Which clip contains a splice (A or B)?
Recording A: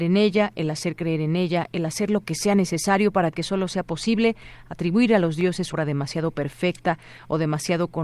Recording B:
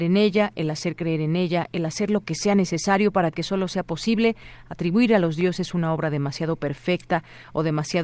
A